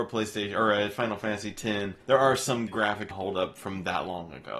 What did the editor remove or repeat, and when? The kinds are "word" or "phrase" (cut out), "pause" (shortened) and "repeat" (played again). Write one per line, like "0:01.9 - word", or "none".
0:02.0 - pause
0:02.7 - phrase
0:03.1 - word